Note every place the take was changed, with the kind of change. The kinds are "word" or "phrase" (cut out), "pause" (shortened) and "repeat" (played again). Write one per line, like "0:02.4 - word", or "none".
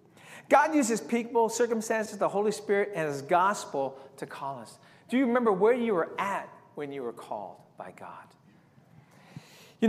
none